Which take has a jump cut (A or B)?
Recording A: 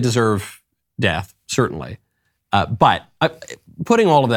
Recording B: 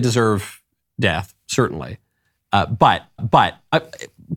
B